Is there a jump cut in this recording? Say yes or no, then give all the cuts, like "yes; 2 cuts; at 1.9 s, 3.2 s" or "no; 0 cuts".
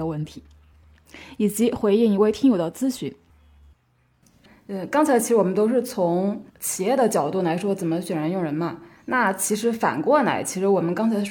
yes; 1 cut; at 6.5 s